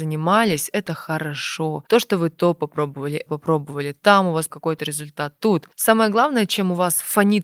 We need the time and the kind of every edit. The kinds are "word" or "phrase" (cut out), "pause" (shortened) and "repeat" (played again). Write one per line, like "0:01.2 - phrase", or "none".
0:03.3 - word
0:04.5 - word